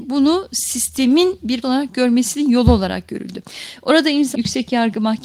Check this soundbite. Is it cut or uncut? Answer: cut